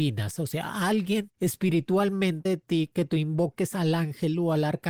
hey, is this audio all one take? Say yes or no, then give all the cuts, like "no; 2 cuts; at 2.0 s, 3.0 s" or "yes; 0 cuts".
no; 1 cut; at 2.5 s